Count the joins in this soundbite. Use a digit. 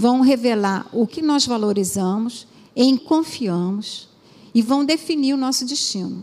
2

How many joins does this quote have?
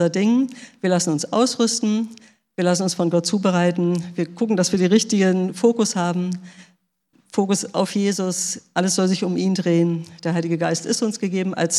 0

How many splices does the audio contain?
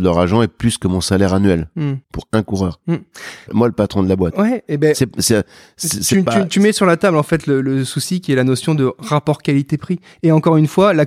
2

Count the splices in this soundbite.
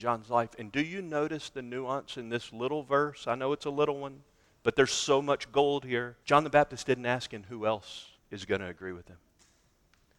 2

